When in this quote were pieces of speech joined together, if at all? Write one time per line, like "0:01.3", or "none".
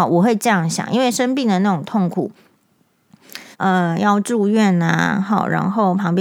0:03.5

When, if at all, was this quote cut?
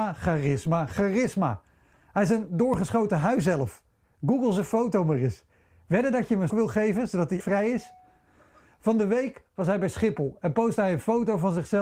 0:06.5
0:07.4

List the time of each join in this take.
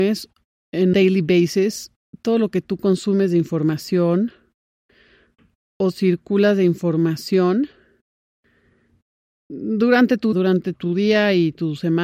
0:00.9
0:10.3
0:10.7

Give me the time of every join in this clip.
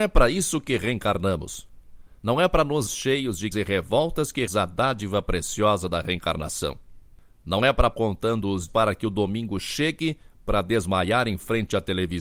0:02.2
0:02.9
0:03.5
0:04.5
0:07.9
0:08.7

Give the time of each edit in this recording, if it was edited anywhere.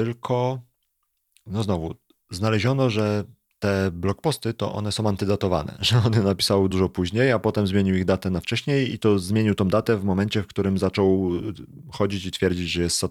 0:06.7

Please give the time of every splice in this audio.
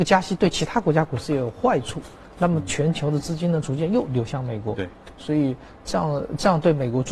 none

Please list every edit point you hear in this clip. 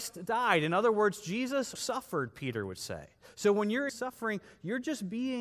0:01.8
0:03.9

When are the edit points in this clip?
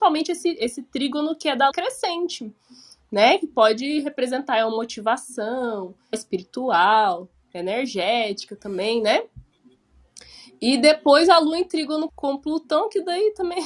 0:01.7
0:06.1
0:12.1

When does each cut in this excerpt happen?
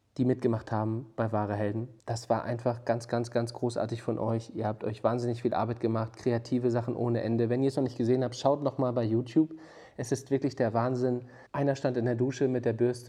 0:02.0
0:11.5

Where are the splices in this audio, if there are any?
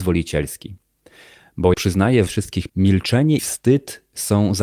0:01.7
0:02.3
0:02.7
0:03.4

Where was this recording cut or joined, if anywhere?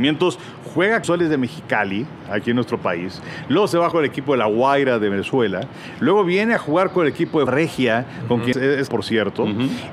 0:01.0
0:03.9
0:07.5
0:08.5
0:08.9

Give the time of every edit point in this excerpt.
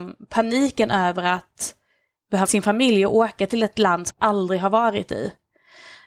0:02.5
0:04.1

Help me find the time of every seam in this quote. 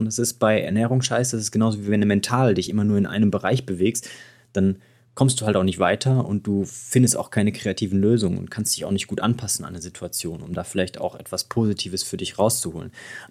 none

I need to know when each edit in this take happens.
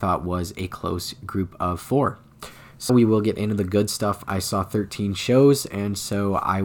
0:02.9

